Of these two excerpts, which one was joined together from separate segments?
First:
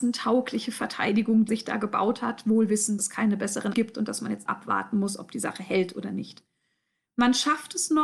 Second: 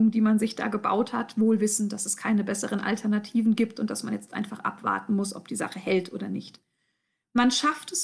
first; 4 cuts; at 1.5 s, 3.0 s, 3.7 s, 4.5 s

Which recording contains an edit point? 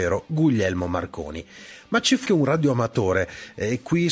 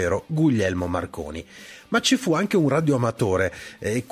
first; 1 cut; at 2.3 s

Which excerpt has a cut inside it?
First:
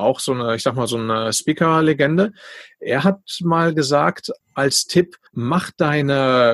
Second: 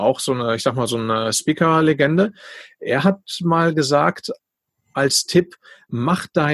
first; 2 cuts; at 4.4 s, 5.3 s

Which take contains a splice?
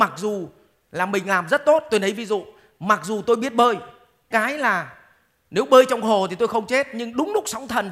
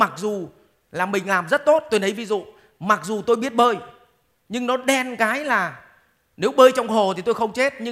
first; 1 cut; at 4.3 s

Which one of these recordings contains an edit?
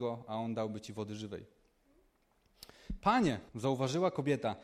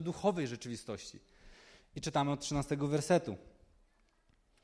first; 1 cut; at 3.5 s

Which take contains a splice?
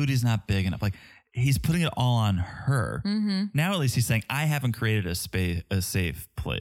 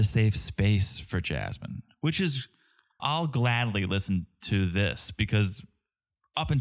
second; 1 cut; at 3.0 s

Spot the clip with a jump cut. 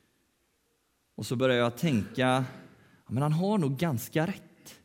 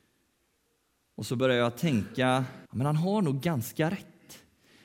second; 1 cut; at 2.7 s

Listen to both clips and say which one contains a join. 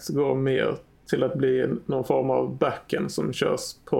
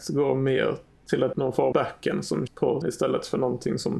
second; 4 cuts; at 1.3 s, 1.7 s, 2.5 s, 2.8 s

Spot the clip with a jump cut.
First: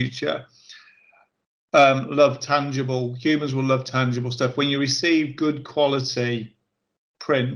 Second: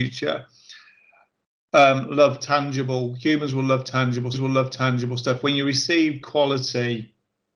second; 2 cuts; at 4.3 s, 6.2 s

